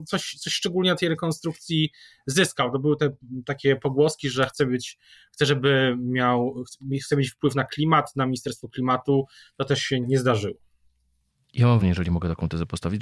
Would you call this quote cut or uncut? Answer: cut